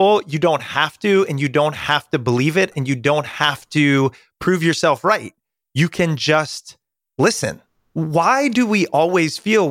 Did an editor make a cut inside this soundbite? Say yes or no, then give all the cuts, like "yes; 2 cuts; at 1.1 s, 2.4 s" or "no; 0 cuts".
no; 0 cuts